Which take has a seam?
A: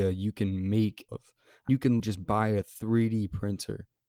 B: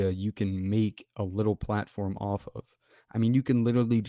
A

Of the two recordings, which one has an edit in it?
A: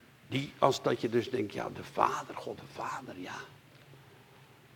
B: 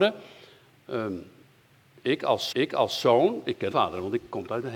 B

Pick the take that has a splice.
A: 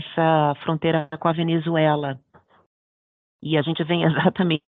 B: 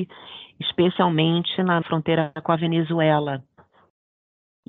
B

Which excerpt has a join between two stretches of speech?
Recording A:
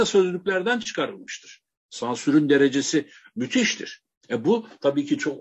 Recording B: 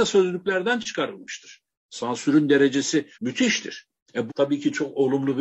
B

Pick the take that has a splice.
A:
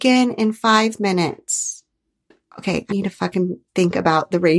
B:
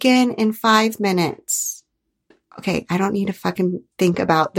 A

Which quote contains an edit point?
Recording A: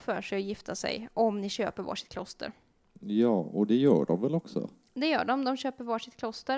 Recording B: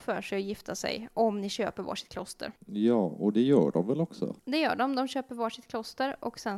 B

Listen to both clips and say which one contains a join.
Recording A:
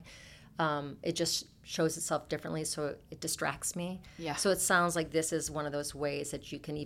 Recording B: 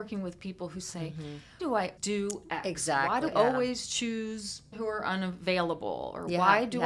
B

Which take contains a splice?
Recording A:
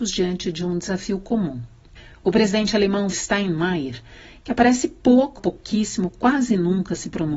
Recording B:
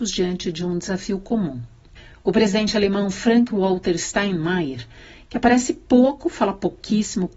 A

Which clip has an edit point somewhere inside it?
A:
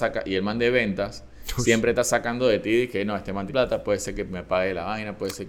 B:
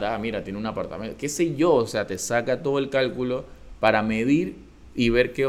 A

